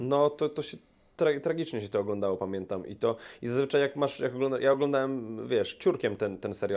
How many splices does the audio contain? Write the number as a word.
zero